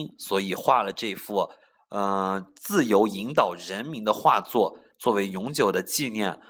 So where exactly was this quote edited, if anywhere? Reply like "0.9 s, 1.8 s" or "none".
none